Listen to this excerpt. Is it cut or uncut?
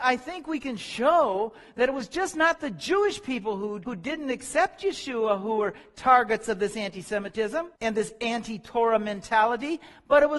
cut